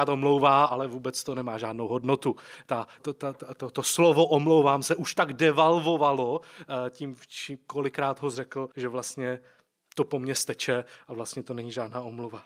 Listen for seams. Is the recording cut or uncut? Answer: cut